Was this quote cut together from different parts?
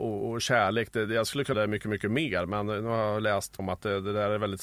yes; 2 cuts; at 1.5 s, 3.6 s

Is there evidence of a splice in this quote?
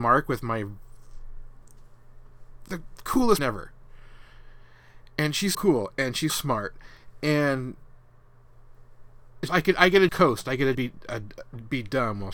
yes; 7 cuts; at 2.7 s, 3.4 s, 5.5 s, 6.3 s, 9.5 s, 10.1 s, 10.7 s

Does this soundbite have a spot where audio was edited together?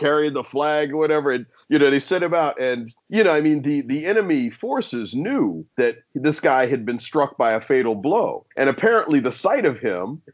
yes; 3 cuts; at 3.0 s, 5.7 s, 8.5 s

